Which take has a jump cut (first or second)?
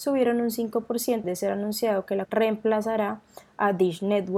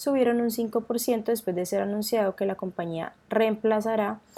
first